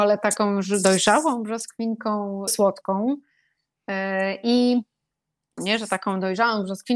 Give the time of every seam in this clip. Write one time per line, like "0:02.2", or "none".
0:02.5
0:05.6